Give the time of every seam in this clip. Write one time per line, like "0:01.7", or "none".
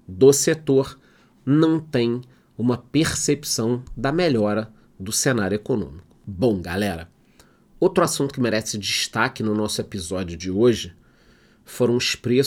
none